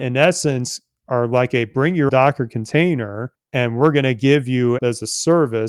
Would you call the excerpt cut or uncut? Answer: cut